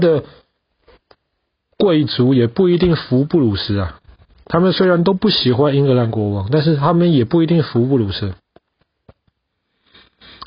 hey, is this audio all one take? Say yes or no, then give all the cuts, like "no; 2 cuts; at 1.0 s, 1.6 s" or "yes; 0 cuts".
yes; 0 cuts